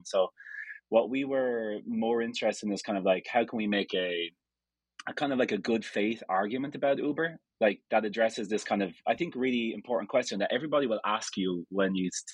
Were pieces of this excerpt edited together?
no; 0 cuts

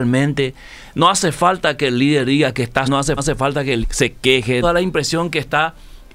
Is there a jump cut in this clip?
yes; 4 cuts; at 2.8 s, 3.2 s, 3.8 s, 4.6 s

